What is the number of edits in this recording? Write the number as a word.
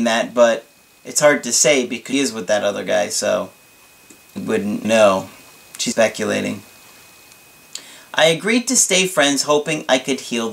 four